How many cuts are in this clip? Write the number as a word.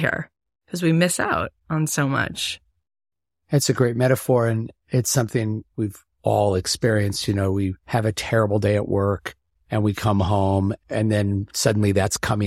one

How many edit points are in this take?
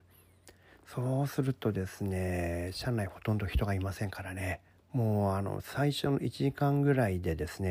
one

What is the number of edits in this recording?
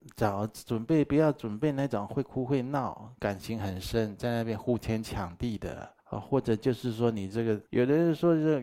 two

